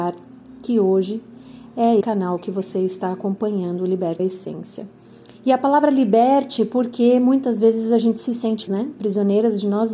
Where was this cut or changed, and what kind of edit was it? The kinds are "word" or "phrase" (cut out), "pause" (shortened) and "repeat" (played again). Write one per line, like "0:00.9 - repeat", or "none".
0:02.0 - word
0:04.2 - word
0:05.3 - pause
0:08.7 - word